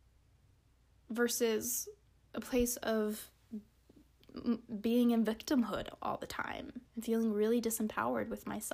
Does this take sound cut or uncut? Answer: cut